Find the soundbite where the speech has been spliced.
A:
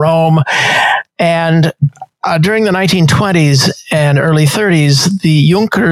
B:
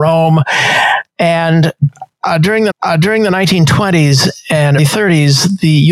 B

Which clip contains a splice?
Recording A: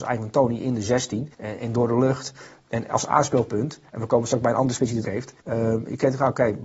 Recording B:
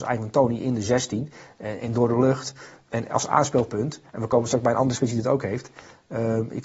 A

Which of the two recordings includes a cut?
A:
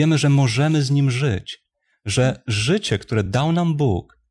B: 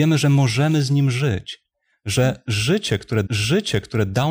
B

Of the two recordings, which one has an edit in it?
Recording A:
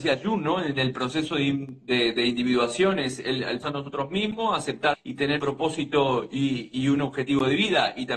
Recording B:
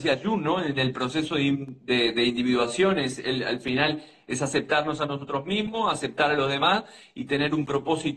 A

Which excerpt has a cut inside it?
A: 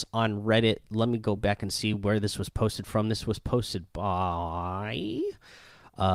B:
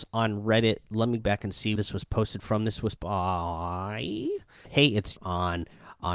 B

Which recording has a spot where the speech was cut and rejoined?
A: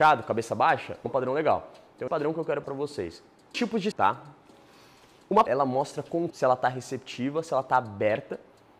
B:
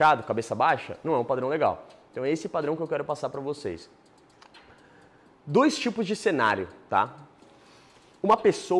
A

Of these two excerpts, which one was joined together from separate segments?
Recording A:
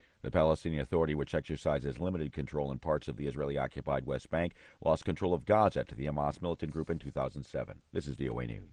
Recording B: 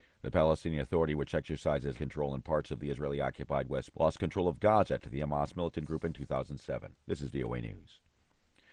B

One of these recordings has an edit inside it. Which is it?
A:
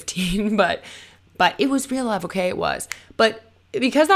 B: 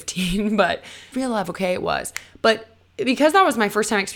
B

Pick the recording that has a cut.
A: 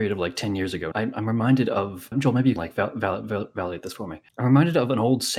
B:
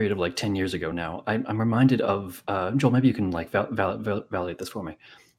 A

